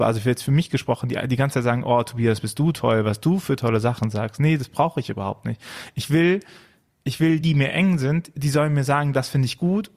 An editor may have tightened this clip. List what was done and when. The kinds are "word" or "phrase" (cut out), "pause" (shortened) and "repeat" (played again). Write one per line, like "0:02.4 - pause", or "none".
0:07.4 - word